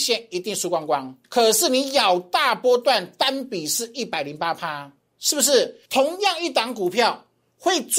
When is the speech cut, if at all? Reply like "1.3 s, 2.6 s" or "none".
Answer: 1.2 s, 5.9 s